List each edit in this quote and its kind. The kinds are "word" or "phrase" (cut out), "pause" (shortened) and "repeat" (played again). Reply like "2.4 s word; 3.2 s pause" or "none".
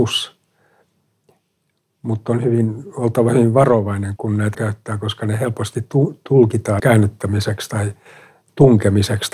4.2 s word; 4.5 s word; 6.8 s word